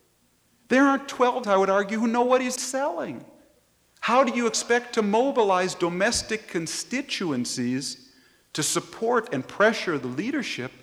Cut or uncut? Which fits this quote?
cut